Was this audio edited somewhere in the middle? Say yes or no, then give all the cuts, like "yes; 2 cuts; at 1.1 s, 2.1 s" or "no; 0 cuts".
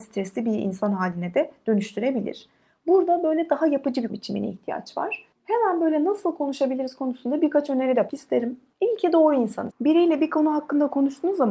yes; 3 cuts; at 4.1 s, 8.1 s, 9.7 s